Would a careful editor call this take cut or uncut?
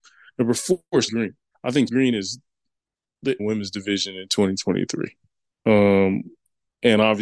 cut